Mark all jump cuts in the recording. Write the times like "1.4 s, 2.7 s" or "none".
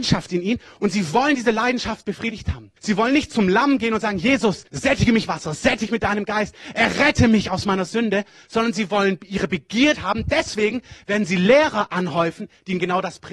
2.8 s, 4.7 s, 5.3 s, 5.9 s, 9.9 s

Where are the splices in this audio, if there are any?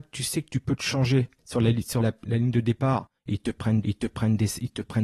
1.4 s, 2.0 s, 3.2 s, 3.8 s

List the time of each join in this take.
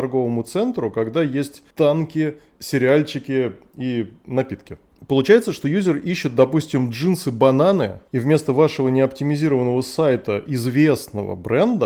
1.7 s

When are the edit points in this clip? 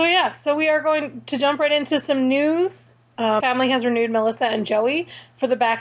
3.4 s

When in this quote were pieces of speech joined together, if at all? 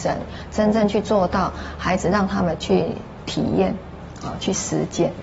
none

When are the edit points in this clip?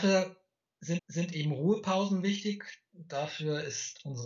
1.0 s

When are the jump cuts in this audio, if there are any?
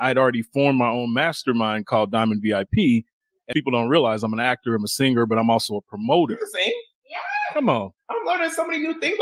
3.5 s

